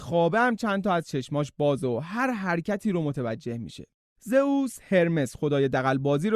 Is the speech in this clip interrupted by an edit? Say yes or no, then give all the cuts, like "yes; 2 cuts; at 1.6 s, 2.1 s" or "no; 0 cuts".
no; 0 cuts